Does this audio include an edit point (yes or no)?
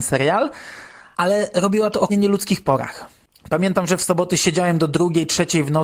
yes